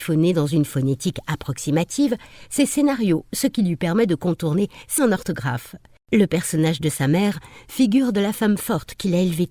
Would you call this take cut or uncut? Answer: cut